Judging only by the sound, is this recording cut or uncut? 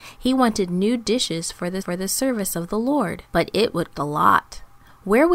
cut